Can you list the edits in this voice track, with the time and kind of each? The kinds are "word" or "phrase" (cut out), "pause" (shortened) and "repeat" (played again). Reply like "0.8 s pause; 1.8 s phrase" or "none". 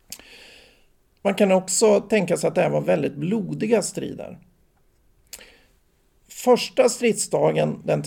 none